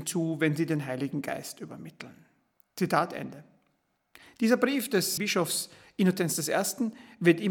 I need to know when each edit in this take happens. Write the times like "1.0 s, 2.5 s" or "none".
2.5 s, 4.0 s, 5.2 s